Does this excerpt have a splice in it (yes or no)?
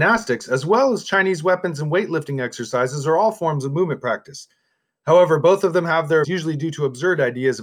yes